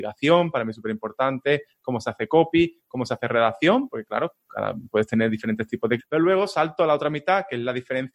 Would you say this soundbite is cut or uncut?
cut